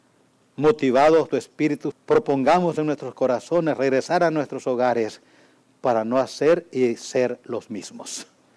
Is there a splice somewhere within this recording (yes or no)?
yes